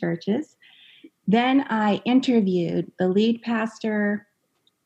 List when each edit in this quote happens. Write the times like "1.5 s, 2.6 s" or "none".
none